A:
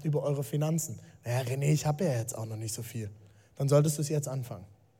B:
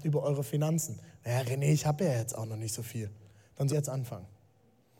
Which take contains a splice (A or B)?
B